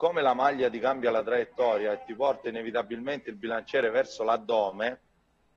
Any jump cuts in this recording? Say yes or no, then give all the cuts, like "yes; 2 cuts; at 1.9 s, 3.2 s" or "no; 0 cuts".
no; 0 cuts